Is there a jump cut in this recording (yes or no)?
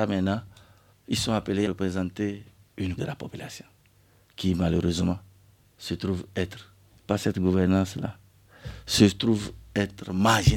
yes